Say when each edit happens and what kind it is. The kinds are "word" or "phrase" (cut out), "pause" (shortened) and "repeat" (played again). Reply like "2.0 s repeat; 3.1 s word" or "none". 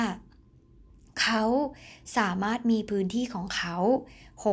none

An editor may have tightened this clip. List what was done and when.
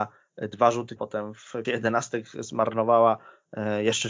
1.0 s word; 1.6 s word

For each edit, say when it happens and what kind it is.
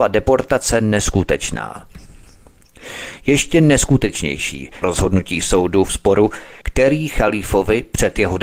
4.8 s word; 5.9 s word

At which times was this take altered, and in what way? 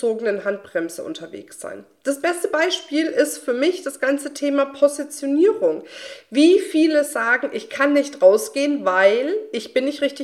none

